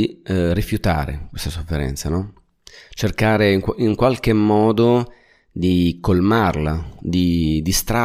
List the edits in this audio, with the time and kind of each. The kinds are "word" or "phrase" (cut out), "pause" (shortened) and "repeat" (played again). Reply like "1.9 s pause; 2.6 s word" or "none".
none